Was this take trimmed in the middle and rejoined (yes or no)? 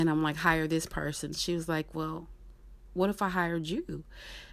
no